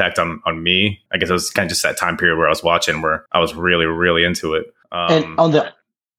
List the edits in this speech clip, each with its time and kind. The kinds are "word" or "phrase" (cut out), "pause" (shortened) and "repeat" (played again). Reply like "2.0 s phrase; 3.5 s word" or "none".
1.1 s pause; 3.3 s pause; 4.8 s pause